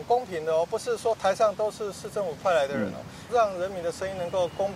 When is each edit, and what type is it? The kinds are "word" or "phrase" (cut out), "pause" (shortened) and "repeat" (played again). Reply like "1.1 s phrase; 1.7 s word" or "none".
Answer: 3.3 s word